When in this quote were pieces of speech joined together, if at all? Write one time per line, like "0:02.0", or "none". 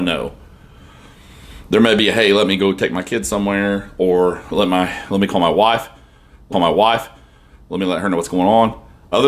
0:06.5